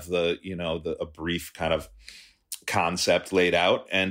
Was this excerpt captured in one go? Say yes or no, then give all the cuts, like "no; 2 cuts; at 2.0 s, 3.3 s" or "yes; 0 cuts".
no; 1 cut; at 1.0 s